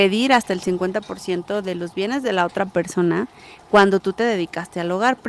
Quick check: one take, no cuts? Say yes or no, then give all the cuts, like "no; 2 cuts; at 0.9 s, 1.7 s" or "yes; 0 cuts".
yes; 0 cuts